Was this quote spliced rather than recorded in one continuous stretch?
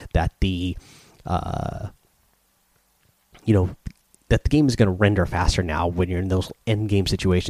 no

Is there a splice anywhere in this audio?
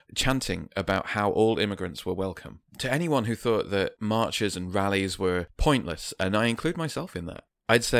yes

